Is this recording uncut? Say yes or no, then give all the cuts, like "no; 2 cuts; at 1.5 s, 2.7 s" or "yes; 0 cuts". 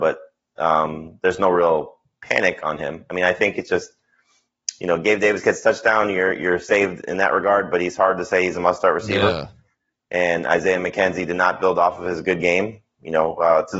yes; 0 cuts